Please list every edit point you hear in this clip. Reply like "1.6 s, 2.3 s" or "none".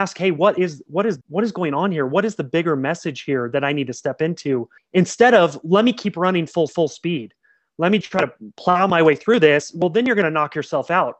1.2 s, 4.8 s, 6.7 s, 8.0 s